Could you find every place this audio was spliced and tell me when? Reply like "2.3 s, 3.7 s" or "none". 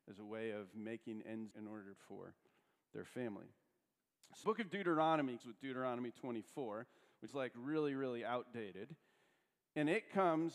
1.5 s, 2.0 s, 4.4 s, 5.4 s, 7.3 s